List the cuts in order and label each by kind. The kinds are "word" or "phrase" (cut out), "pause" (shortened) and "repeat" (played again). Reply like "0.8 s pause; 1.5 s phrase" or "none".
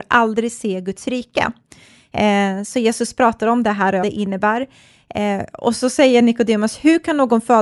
4.0 s phrase